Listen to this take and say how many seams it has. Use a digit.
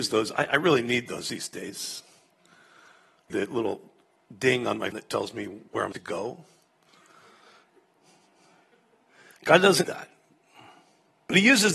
4